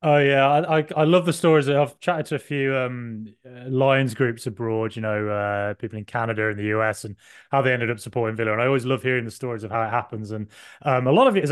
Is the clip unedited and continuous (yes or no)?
yes